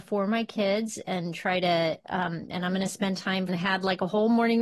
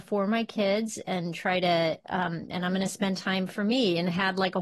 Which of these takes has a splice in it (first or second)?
first